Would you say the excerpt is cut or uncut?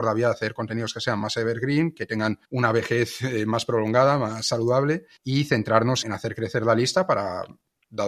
cut